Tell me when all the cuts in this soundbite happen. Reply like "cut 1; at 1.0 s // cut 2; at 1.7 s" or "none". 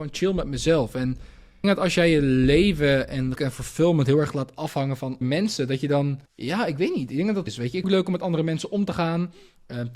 cut 1; at 1.6 s // cut 2; at 3.3 s // cut 3; at 5.2 s // cut 4; at 6.3 s // cut 5; at 7.5 s // cut 6; at 7.8 s